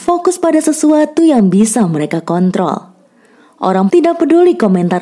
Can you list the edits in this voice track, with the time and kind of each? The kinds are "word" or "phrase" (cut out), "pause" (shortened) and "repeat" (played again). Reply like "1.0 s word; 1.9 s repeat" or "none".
3.9 s word